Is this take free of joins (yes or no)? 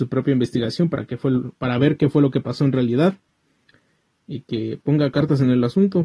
yes